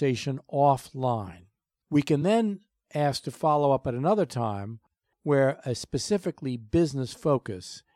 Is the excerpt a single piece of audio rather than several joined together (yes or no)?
yes